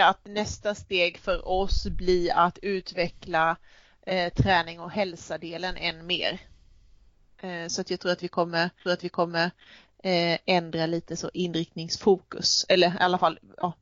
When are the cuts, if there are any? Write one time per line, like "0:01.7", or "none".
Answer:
0:08.9